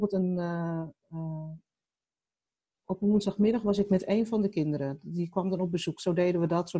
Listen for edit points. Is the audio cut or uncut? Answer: uncut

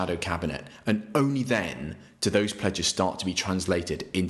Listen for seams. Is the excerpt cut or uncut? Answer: uncut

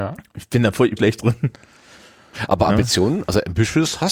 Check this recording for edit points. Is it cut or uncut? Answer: cut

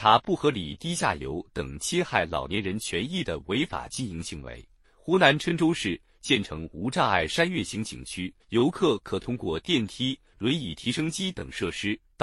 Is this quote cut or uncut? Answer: cut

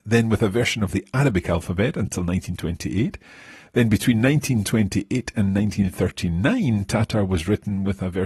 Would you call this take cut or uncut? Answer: uncut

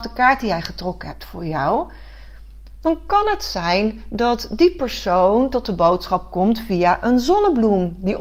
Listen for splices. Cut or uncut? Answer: uncut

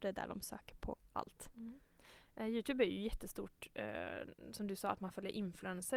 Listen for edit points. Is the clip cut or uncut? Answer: uncut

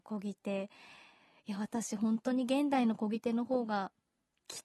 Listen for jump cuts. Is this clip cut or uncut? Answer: uncut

